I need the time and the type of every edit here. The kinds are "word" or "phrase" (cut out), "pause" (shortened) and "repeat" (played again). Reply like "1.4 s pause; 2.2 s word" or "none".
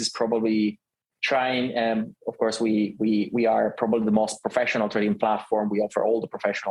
none

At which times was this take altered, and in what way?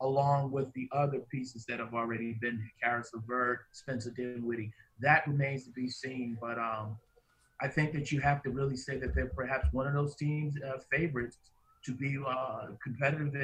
none

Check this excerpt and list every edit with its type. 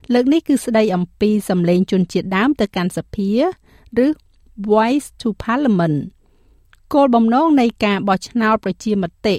none

